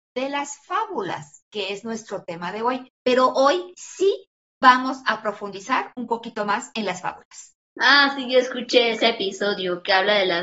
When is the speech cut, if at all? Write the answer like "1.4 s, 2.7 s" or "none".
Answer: 7.6 s